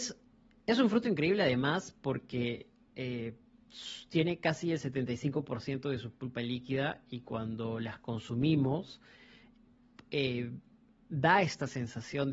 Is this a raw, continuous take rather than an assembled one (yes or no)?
yes